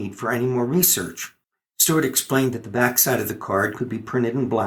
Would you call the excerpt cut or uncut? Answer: cut